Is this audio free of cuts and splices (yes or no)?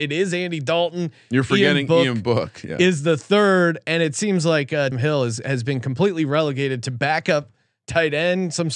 no